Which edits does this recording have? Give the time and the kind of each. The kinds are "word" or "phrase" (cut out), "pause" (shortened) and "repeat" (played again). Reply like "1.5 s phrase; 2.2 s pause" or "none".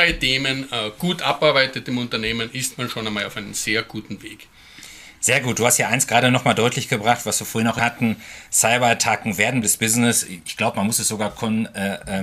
7.8 s phrase; 9.6 s word